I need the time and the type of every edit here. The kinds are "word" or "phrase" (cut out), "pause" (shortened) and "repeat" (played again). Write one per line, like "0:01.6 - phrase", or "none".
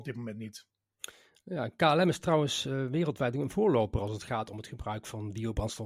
none